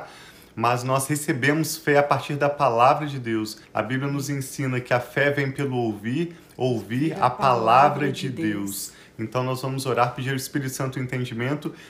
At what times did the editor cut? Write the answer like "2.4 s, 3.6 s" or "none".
3.6 s